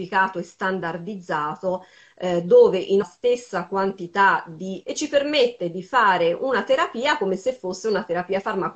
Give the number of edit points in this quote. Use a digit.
2